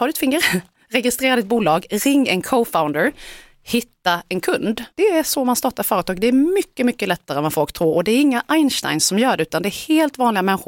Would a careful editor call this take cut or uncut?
cut